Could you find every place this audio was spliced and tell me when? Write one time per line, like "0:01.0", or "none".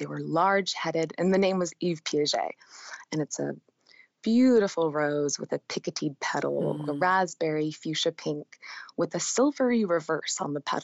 none